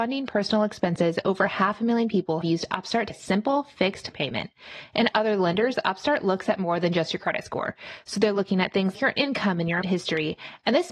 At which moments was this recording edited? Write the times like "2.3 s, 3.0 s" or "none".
2.4 s, 3.1 s, 4.1 s, 5.1 s, 8.9 s, 9.8 s